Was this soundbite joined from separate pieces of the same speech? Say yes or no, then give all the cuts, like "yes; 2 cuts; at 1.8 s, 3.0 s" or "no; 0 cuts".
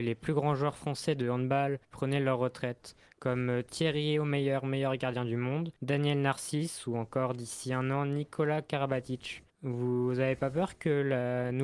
yes; 3 cuts; at 1.8 s, 5.8 s, 9.5 s